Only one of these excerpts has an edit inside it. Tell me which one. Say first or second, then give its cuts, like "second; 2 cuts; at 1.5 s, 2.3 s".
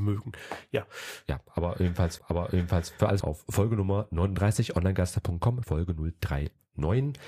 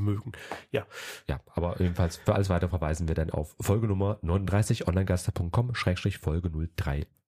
first; 3 cuts; at 2.2 s, 3.2 s, 5.6 s